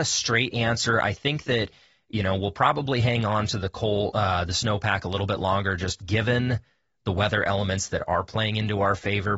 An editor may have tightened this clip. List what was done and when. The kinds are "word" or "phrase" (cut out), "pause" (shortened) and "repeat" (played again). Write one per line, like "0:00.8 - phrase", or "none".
none